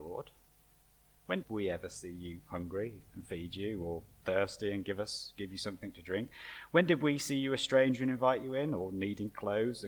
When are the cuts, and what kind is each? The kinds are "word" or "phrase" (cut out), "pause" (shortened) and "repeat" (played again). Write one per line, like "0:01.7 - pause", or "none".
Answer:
0:01.4 - word